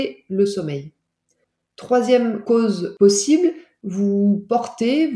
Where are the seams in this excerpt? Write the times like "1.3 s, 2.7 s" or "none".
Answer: none